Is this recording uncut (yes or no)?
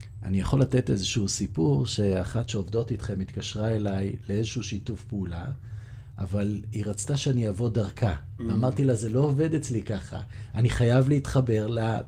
no